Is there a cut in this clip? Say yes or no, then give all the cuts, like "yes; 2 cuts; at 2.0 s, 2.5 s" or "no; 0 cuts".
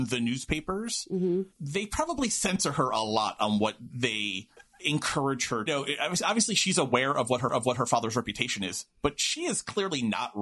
yes; 4 cuts; at 1.5 s, 4.6 s, 5.7 s, 7.5 s